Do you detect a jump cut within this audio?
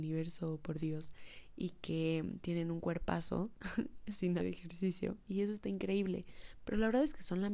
yes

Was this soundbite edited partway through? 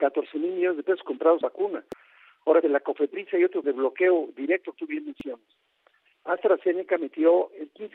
yes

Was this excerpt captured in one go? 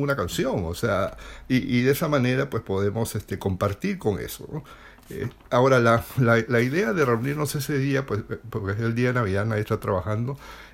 yes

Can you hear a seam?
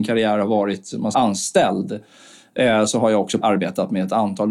yes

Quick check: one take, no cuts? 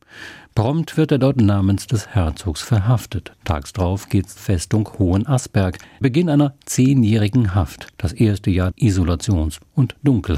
no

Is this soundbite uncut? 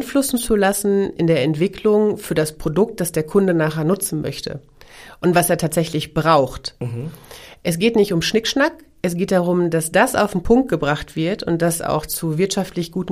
yes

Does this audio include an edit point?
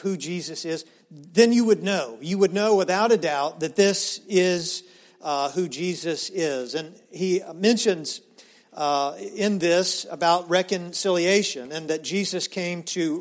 no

